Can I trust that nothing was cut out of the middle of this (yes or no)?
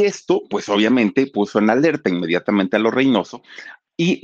yes